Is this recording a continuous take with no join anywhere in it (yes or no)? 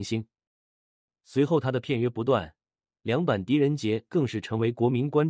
yes